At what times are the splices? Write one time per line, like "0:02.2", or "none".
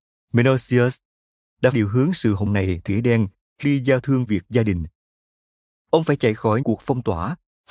0:01.7
0:02.5
0:02.9
0:03.6
0:04.3
0:06.6